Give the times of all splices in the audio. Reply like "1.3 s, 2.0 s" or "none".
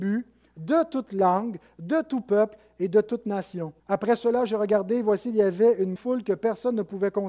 3.8 s, 6.0 s